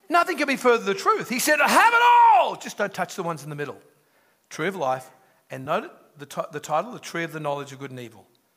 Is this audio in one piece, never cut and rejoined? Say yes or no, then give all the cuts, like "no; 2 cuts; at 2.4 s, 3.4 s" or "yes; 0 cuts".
yes; 0 cuts